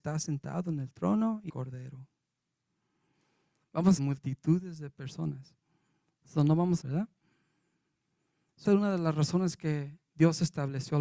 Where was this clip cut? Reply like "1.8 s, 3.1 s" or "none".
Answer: 1.5 s, 4.0 s, 6.8 s, 8.6 s